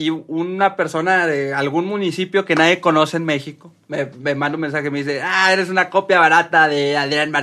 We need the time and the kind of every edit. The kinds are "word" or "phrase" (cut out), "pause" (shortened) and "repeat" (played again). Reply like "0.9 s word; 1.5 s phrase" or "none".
none